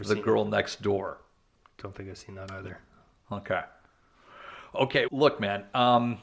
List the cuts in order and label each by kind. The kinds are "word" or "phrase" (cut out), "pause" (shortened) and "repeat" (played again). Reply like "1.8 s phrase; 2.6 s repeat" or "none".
5.1 s word